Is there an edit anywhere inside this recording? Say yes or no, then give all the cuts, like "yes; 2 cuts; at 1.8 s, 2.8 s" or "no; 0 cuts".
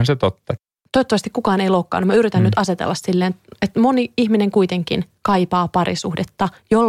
no; 0 cuts